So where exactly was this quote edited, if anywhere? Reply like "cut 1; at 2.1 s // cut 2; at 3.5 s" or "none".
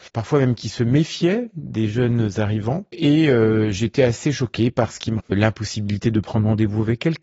cut 1; at 5.2 s